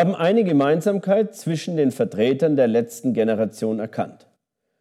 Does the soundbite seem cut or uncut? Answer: uncut